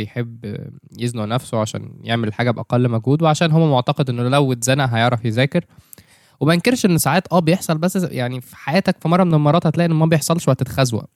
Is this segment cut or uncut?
uncut